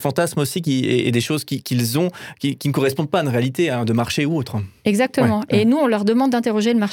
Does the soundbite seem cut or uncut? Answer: uncut